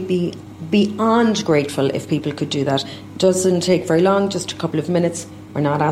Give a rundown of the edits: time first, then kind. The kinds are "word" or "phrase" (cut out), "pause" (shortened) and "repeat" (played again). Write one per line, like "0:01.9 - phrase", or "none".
none